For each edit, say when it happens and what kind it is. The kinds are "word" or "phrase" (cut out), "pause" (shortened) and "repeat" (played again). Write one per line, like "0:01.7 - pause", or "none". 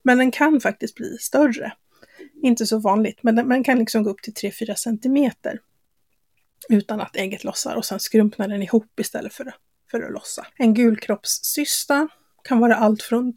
0:10.5 - pause